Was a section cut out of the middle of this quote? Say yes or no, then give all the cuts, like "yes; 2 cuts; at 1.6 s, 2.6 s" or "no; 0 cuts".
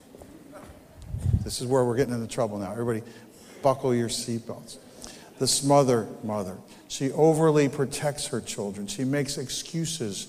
no; 0 cuts